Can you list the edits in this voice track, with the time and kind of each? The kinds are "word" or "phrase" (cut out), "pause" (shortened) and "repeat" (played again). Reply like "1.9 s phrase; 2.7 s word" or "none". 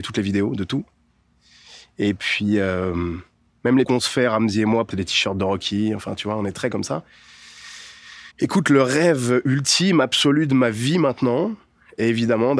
3.3 s pause; 3.8 s phrase; 4.9 s phrase; 8.3 s pause